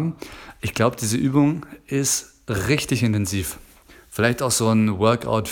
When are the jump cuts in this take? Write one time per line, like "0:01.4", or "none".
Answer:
none